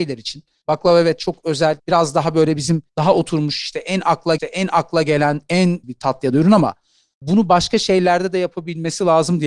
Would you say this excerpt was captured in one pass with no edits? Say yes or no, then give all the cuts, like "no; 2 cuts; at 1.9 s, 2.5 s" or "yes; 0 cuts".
no; 5 cuts; at 1.8 s, 2.9 s, 4.4 s, 5.8 s, 7.2 s